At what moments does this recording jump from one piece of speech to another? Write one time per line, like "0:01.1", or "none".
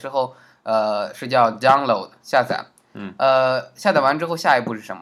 none